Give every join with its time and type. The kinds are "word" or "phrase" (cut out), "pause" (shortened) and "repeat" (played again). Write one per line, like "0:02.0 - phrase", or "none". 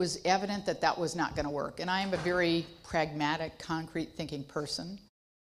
none